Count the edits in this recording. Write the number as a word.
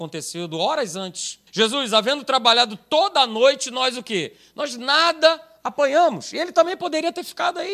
one